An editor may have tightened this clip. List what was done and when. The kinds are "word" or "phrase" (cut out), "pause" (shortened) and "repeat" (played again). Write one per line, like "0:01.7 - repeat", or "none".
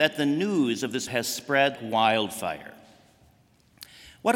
0:01.1 - word
0:01.8 - word